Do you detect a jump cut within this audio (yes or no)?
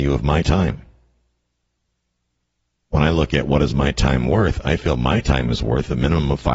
no